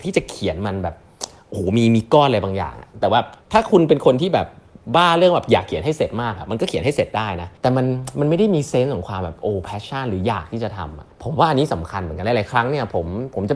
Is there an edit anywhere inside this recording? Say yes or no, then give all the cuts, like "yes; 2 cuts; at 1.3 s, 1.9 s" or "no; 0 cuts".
yes; 3 cuts; at 3.4 s, 7.6 s, 11.1 s